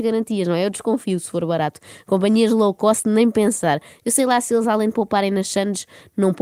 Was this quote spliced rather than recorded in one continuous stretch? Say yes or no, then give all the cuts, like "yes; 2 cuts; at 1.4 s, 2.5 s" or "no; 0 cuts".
no; 0 cuts